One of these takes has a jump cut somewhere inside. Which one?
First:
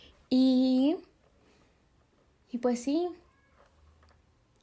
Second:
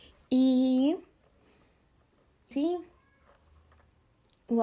second; 1 cut; at 2.5 s

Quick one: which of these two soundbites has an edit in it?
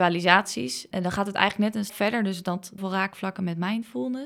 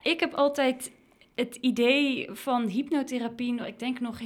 first; 3 cuts; at 0.9 s, 1.9 s, 2.8 s

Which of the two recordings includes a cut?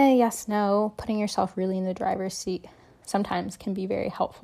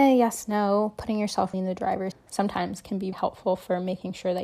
second; 3 cuts; at 1.5 s, 2.1 s, 3.1 s

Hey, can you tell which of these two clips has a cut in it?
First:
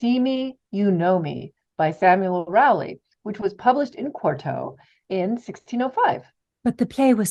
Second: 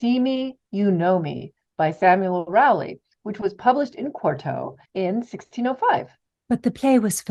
second; 1 cut; at 4.9 s

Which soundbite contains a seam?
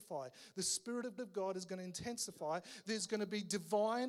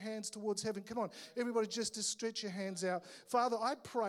first; 1 cut; at 1.2 s

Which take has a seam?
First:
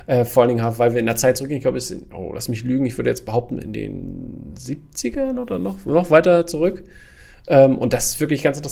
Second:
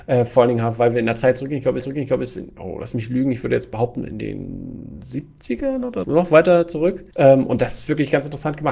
second; 3 cuts; at 1.8 s, 6.0 s, 7.1 s

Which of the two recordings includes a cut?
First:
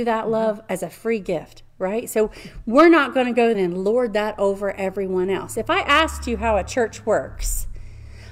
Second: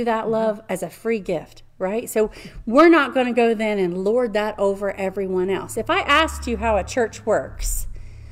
first; 1 cut; at 3.5 s

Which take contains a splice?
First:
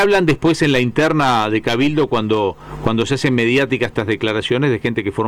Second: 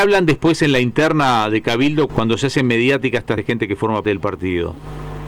second; 3 cuts; at 2.1 s, 3.4 s, 4.0 s

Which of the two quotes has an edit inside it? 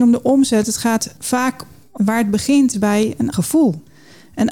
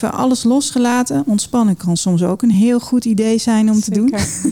first; 3 cuts; at 2.0 s, 2.7 s, 3.3 s

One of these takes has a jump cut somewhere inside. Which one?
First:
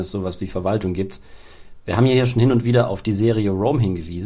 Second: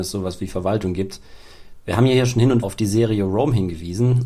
second; 1 cut; at 2.6 s

